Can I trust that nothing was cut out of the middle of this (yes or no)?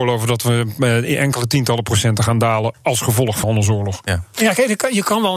no